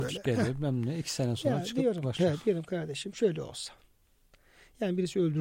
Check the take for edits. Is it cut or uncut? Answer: cut